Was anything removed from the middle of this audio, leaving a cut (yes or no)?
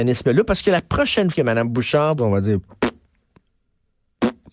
yes